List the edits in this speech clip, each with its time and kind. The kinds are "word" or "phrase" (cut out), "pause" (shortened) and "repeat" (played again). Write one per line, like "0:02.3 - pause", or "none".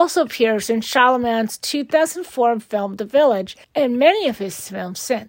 0:03.6 - pause